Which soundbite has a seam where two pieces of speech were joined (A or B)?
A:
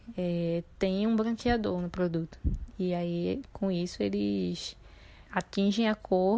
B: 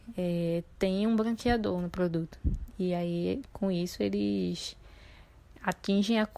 A